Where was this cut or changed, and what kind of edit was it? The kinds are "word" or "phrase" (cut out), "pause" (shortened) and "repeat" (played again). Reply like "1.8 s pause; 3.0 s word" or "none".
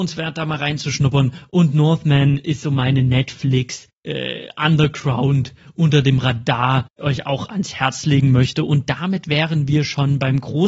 7.0 s phrase